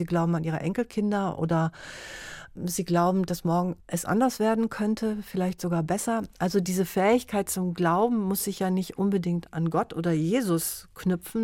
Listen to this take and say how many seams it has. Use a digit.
1